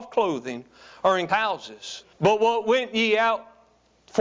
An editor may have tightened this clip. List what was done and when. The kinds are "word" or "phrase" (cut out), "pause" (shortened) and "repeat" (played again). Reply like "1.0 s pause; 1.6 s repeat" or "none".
1.3 s word; 2.1 s pause